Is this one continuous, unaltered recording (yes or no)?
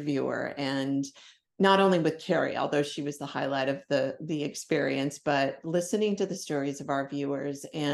yes